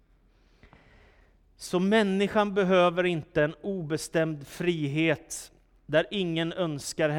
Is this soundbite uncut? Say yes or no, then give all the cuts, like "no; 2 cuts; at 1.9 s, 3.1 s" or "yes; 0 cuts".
yes; 0 cuts